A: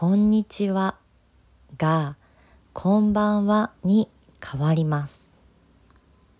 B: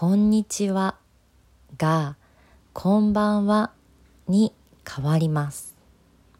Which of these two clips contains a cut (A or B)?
A